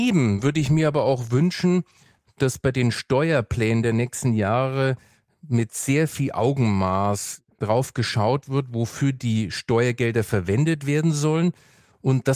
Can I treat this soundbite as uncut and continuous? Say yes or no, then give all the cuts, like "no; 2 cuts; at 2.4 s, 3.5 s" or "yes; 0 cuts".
yes; 0 cuts